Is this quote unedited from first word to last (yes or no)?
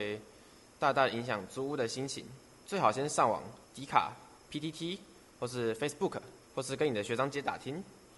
no